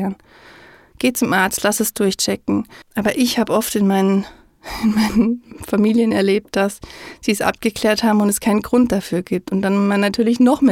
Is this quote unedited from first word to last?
no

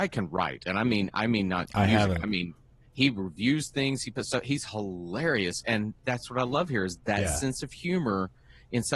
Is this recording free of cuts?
yes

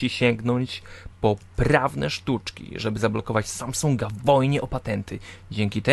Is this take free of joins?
yes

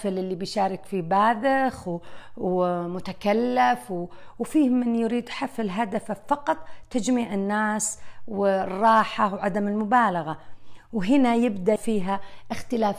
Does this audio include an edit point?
yes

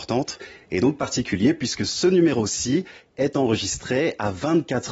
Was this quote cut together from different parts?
no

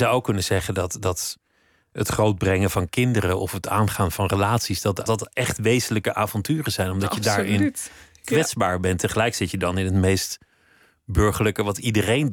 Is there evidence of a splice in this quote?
yes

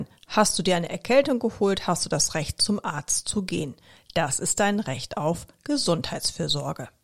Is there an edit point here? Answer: no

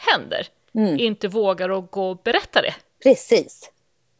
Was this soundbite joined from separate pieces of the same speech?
no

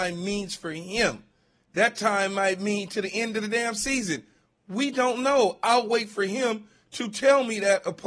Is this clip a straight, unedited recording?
yes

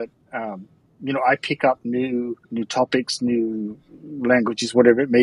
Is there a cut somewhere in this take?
yes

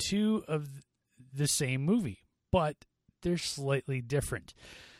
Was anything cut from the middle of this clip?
no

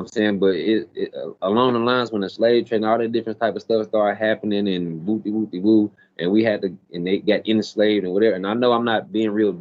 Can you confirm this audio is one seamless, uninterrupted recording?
yes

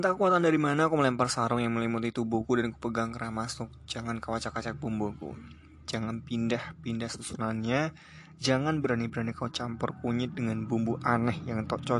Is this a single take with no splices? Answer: yes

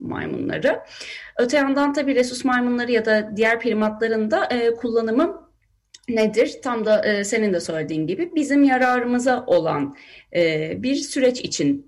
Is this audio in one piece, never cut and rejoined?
yes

